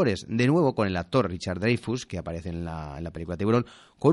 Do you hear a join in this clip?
no; 0 cuts

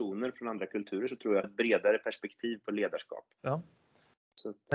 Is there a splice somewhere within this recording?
yes; 1 cut; at 1.4 s

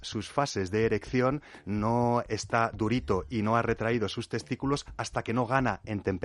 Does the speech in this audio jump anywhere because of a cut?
no; 0 cuts

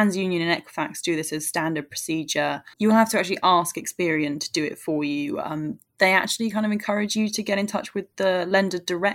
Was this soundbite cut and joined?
yes; 1 cut; at 2.7 s

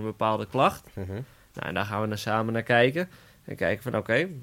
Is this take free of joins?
yes; 0 cuts

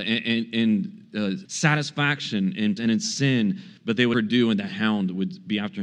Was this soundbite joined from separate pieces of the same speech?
yes; 3 cuts; at 1.4 s, 2.8 s, 4.1 s

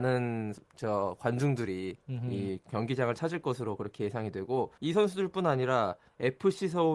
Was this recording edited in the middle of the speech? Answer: yes; 1 cut; at 4.8 s

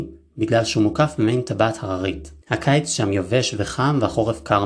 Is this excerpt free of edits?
no; 1 cut; at 2.4 s

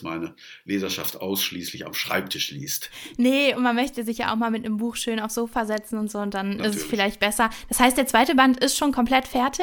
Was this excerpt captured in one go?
yes; 0 cuts

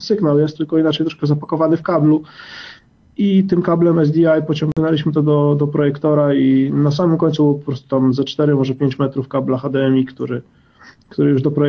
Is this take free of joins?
yes; 0 cuts

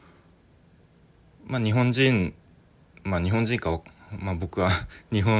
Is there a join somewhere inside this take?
no; 0 cuts

